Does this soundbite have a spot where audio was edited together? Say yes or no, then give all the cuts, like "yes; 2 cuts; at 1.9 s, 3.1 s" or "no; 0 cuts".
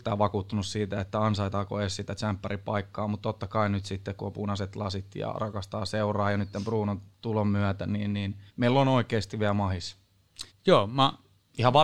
yes; 3 cuts; at 7.1 s, 8.5 s, 10.5 s